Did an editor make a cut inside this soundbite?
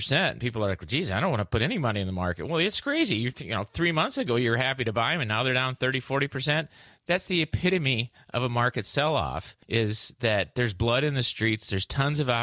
yes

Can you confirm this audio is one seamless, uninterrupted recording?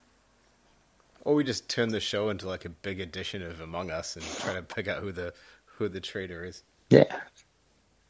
yes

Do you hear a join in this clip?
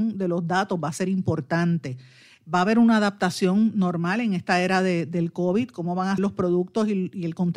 yes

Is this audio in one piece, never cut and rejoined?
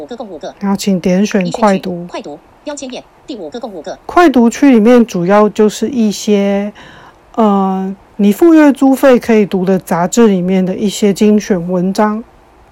no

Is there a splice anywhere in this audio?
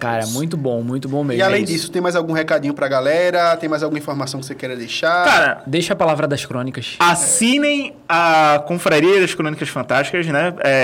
no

